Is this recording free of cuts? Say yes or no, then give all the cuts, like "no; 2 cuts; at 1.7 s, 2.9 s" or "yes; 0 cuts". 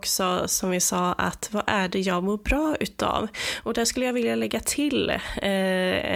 yes; 0 cuts